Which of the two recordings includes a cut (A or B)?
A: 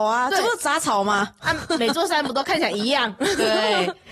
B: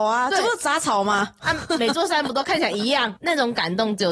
B